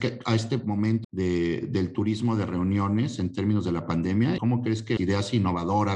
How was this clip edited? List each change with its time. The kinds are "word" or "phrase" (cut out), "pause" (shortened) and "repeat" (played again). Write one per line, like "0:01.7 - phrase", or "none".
0:01.0 - word
0:04.4 - word
0:05.0 - word